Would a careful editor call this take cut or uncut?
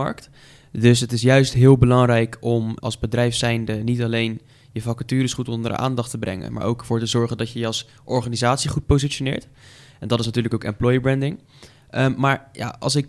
cut